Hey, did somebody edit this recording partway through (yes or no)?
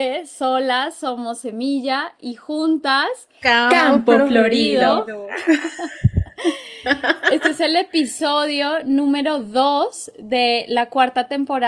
no